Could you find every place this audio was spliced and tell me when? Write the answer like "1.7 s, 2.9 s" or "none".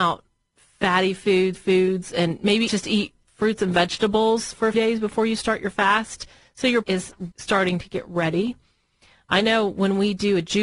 1.6 s, 2.7 s, 3.3 s, 4.7 s, 6.8 s, 7.3 s